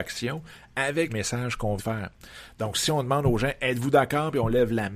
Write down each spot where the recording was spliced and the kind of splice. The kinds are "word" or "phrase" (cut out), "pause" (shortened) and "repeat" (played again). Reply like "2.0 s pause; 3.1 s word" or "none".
1.1 s word; 1.8 s word